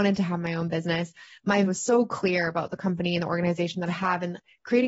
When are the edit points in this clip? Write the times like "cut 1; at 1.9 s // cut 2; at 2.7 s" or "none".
cut 1; at 1.7 s // cut 2; at 3.9 s